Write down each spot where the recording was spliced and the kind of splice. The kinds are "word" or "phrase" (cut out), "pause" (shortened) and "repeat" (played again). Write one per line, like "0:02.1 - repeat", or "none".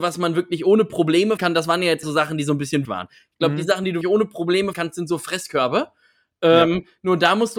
0:01.4 - word
0:02.0 - word
0:02.8 - word
0:04.0 - word
0:04.7 - word